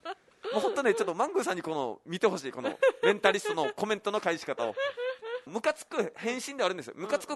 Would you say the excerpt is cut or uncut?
cut